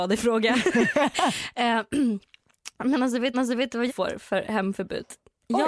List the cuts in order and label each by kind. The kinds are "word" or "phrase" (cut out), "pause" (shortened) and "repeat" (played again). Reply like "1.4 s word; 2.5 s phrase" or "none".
3.3 s repeat; 3.9 s word